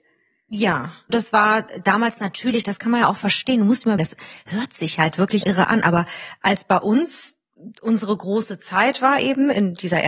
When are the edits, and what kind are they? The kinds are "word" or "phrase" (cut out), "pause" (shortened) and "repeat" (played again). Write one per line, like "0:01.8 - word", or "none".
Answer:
0:01.1 - word
0:04.0 - word
0:05.4 - word

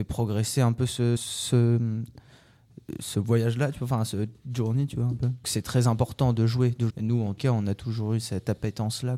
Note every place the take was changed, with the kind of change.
0:01.2 - word
0:05.4 - word
0:06.9 - phrase
0:07.4 - word

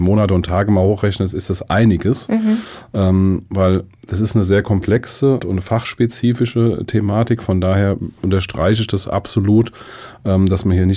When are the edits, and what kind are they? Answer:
0:05.4 - word

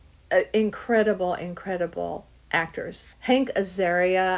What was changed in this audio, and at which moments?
0:03.1 - pause

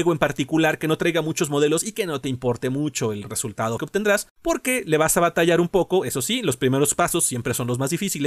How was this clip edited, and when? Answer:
0:03.8 - word
0:04.3 - pause

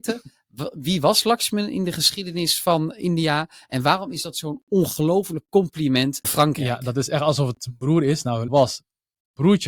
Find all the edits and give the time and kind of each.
0:06.2 - word
0:08.5 - word

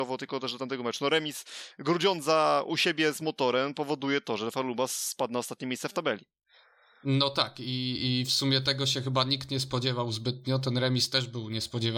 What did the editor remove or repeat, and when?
none

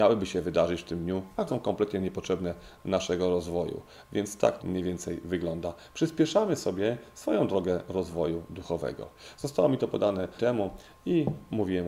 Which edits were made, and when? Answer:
0:01.5 - word
0:02.7 - word
0:04.6 - word
0:10.4 - word

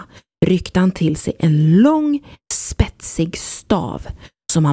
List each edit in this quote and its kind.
none

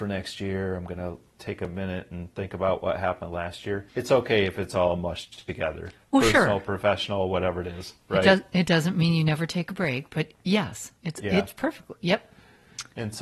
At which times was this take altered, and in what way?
0:03.9 - pause
0:11.0 - pause

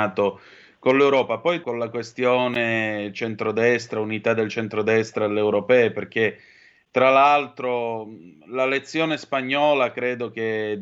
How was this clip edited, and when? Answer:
0:01.6 - word

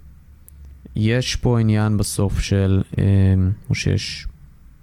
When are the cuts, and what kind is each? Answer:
0:03.6 - word

